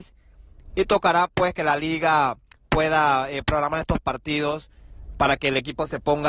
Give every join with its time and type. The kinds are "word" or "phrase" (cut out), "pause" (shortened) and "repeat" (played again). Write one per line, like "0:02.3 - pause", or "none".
none